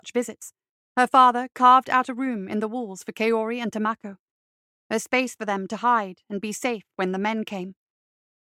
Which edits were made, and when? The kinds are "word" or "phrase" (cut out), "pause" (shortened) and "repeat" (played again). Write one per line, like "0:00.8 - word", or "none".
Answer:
none